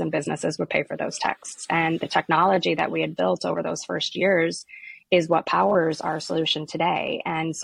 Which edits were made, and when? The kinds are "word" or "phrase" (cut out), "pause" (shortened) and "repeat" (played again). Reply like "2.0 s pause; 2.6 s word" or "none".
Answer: none